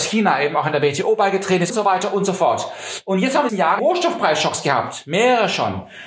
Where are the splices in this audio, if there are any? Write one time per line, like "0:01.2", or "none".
0:01.7
0:03.5
0:03.8